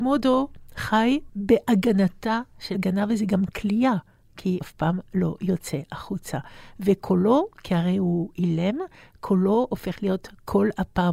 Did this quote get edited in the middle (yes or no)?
yes